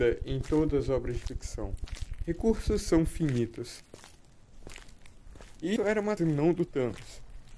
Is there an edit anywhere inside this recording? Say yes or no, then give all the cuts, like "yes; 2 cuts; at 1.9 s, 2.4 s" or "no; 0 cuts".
yes; 2 cuts; at 5.8 s, 6.2 s